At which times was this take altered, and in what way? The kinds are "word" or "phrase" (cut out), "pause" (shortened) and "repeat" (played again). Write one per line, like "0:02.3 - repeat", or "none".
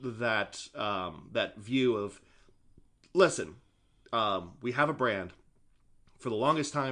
none